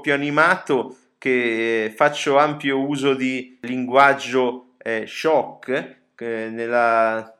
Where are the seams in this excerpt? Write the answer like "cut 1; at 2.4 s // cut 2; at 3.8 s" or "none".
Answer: none

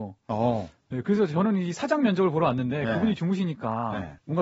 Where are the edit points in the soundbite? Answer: none

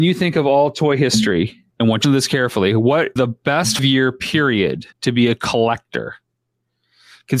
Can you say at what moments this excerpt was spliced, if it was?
cut 1; at 1.7 s // cut 2; at 2.0 s // cut 3; at 3.2 s // cut 4; at 3.8 s // cut 5; at 4.9 s

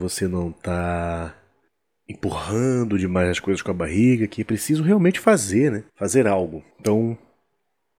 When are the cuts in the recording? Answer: cut 1; at 1.7 s // cut 2; at 5.9 s // cut 3; at 6.7 s

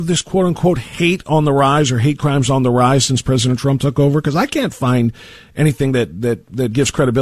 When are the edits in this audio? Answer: none

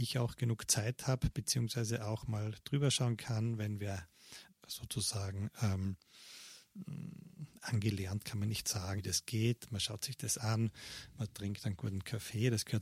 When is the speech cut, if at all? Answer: cut 1; at 4.5 s // cut 2; at 9.0 s

